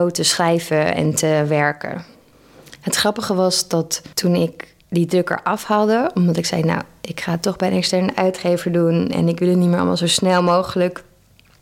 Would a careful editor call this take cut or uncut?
cut